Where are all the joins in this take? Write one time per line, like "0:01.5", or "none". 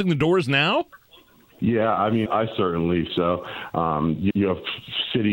0:02.3
0:03.1
0:04.3